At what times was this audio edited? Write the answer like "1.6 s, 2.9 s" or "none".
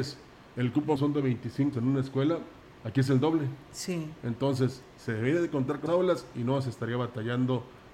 1.0 s, 1.7 s, 5.9 s